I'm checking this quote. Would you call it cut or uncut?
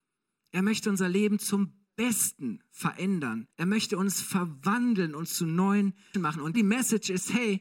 cut